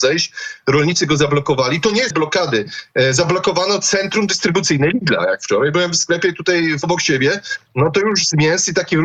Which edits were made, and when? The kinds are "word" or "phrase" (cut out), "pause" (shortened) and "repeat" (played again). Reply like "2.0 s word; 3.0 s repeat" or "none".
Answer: 2.1 s phrase; 6.8 s word